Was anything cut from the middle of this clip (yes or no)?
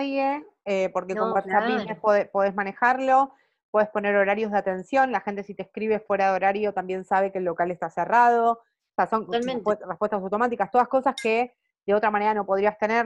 no